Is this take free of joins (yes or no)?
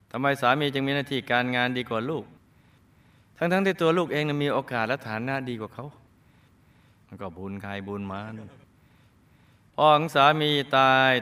yes